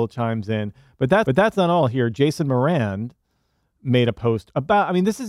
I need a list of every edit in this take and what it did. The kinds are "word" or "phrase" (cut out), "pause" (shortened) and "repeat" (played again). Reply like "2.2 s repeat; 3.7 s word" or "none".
1.3 s repeat